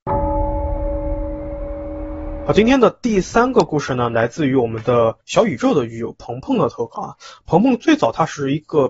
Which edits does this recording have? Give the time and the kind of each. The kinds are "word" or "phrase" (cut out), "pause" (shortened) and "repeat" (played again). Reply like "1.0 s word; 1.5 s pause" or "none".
5.2 s pause